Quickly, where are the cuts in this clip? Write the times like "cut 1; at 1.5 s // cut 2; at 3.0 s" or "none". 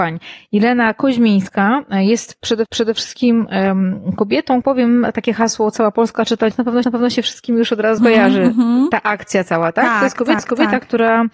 cut 1; at 2.7 s // cut 2; at 4.6 s // cut 3; at 6.5 s // cut 4; at 6.8 s // cut 5; at 8.0 s // cut 6; at 10.4 s